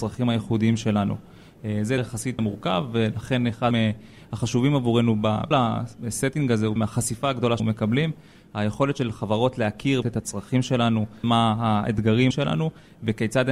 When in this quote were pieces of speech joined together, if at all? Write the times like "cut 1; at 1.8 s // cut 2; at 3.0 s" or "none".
cut 1; at 2.0 s // cut 2; at 2.4 s // cut 3; at 3.7 s // cut 4; at 5.5 s // cut 5; at 6.8 s // cut 6; at 7.6 s // cut 7; at 10.0 s // cut 8; at 11.2 s // cut 9; at 12.3 s